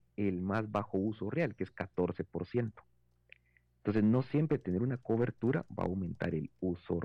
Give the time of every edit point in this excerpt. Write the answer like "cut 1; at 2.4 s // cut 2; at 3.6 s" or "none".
none

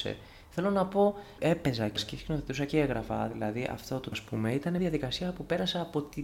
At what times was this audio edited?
cut 1; at 1.4 s // cut 2; at 2.0 s // cut 3; at 4.1 s // cut 4; at 4.8 s

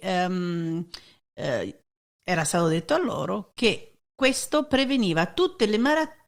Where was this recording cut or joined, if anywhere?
none

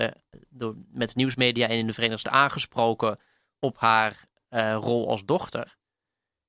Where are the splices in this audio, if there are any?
cut 1; at 2.2 s

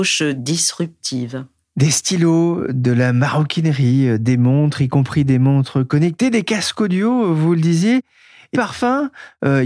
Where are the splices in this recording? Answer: cut 1; at 8.5 s

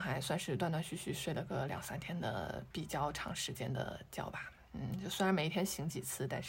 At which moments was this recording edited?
cut 1; at 2.7 s

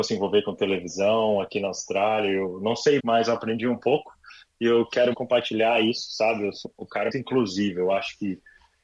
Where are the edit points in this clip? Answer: cut 1; at 3.0 s // cut 2; at 5.1 s // cut 3; at 6.6 s // cut 4; at 7.1 s

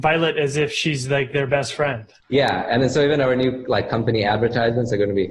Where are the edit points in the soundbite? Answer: cut 1; at 2.2 s

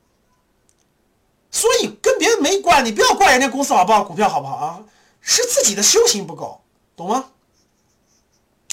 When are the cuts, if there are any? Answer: none

